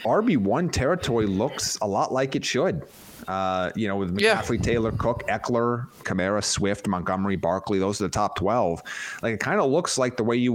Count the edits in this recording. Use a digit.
1